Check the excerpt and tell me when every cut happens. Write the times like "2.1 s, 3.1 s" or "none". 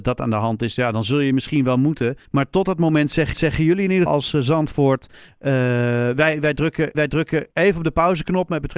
2.3 s, 3.3 s, 4.1 s, 6.9 s